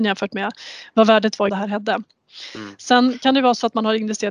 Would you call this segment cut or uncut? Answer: cut